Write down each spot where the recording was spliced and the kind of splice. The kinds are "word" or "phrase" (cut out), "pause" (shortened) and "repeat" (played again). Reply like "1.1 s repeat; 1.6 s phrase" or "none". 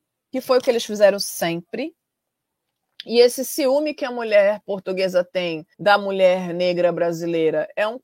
5.7 s pause